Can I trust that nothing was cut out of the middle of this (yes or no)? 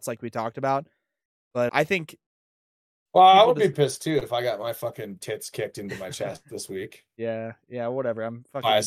no